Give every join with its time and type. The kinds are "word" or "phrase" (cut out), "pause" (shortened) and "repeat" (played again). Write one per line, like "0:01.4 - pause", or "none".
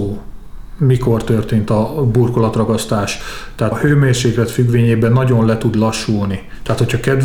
0:03.7 - word